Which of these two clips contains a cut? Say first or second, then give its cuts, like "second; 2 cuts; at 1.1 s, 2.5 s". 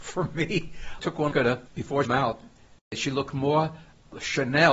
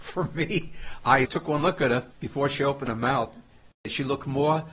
first; 3 cuts; at 1.0 s, 1.3 s, 2.0 s